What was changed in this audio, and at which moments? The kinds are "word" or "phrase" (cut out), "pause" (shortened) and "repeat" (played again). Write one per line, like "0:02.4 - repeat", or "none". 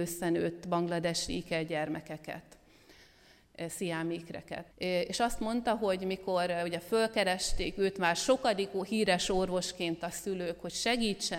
0:04.7 - pause

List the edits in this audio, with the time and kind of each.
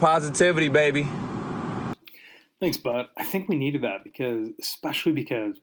none

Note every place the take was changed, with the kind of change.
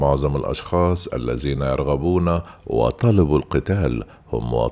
none

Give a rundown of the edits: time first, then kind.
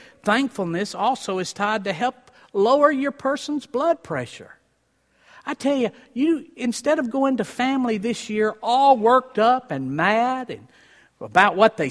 none

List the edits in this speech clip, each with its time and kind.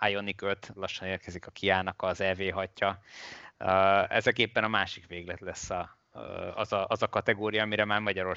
none

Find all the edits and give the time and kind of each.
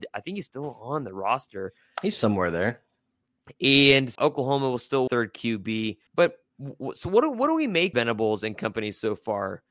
0:04.2 - word
0:05.1 - phrase
0:06.1 - pause
0:07.9 - word

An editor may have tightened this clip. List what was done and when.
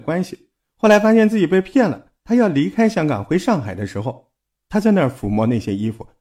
none

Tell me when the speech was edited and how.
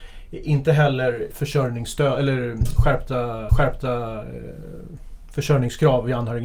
0:01.3 - word
0:03.5 - repeat

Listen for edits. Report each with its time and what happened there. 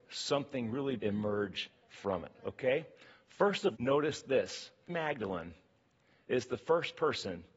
0:01.0 - word
0:03.7 - word
0:04.9 - word

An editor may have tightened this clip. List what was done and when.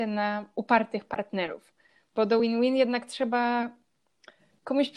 none

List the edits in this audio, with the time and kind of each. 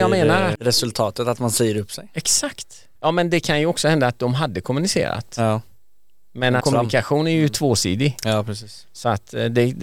0:03.0 - pause
0:06.6 - word

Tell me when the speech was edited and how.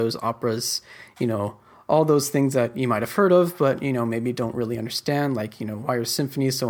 none

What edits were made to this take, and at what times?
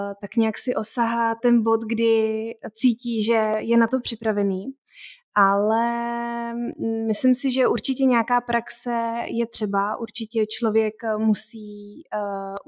0:01.4 - word

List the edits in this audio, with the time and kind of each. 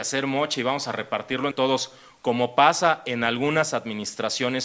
0:01.5 - word

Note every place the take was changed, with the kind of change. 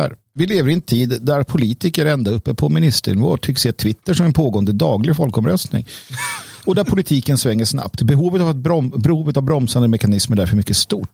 none

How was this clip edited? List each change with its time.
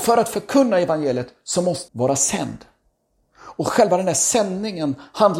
0:01.9 - word

